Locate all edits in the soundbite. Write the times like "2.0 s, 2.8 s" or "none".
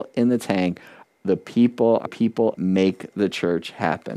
2.1 s, 2.5 s